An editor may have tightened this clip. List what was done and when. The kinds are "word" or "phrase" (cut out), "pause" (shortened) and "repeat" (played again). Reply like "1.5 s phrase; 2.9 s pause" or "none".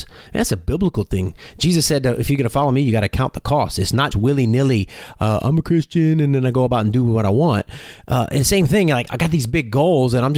4.1 s word; 9.1 s word